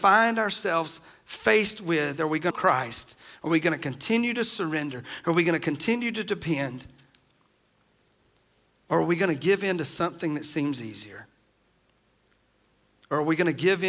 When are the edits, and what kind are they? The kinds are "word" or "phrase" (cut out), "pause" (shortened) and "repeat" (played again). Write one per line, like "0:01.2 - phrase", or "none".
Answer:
0:02.5 - phrase